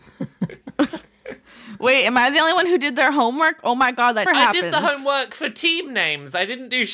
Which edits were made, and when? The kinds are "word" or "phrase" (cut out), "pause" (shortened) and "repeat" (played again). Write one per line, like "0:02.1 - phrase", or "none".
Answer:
0:04.3 - word